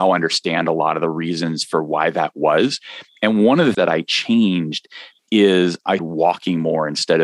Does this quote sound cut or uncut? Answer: cut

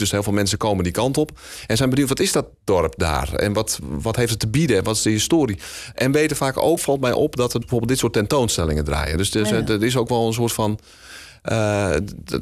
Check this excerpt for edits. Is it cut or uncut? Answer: cut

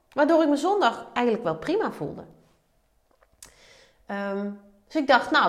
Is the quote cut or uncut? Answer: uncut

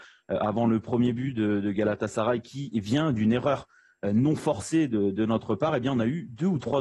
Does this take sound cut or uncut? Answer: uncut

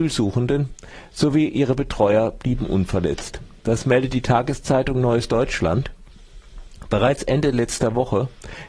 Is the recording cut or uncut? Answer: uncut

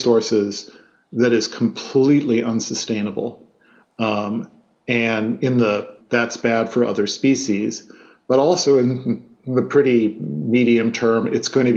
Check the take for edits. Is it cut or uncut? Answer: cut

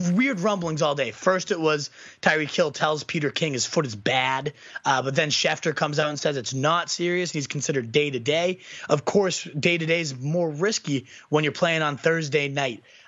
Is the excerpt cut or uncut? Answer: uncut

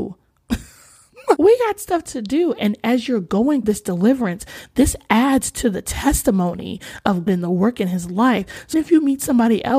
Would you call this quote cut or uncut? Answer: cut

